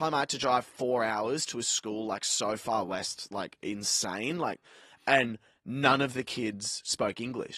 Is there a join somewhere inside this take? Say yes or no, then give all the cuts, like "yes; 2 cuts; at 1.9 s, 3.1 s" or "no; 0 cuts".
no; 0 cuts